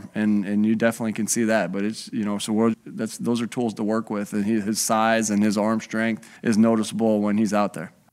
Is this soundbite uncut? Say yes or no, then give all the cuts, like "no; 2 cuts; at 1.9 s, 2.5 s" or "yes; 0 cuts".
no; 2 cuts; at 2.7 s, 6.4 s